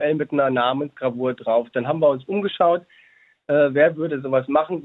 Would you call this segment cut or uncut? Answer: uncut